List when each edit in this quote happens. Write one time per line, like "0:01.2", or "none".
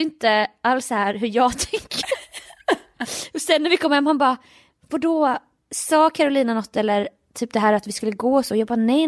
none

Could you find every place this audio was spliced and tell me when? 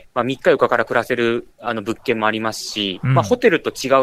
0:01.5

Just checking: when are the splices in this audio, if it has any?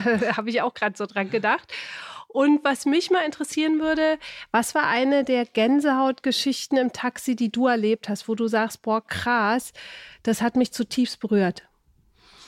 none

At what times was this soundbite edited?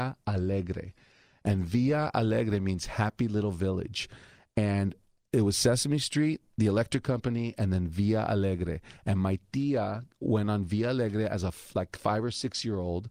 none

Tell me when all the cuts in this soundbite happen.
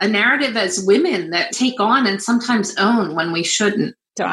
0:01.5

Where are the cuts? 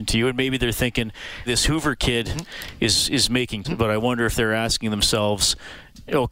0:01.5
0:03.6

